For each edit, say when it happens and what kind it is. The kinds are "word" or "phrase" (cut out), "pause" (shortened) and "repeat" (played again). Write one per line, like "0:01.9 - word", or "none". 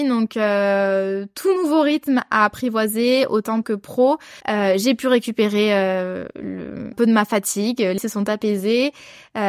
0:03.6 - word
0:04.4 - pause
0:06.9 - word
0:08.0 - word